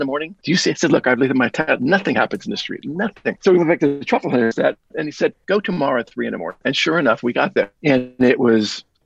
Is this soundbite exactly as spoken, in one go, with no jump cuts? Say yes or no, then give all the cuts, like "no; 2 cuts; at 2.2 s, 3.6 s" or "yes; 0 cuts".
yes; 0 cuts